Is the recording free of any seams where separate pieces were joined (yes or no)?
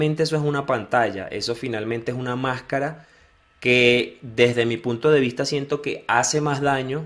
yes